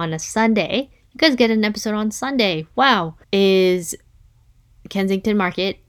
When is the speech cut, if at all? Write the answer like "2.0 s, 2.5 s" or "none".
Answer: 3.2 s